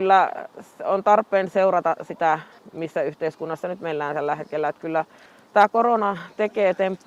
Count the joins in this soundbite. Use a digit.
0